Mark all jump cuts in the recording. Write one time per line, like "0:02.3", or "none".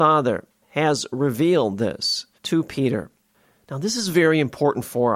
0:02.4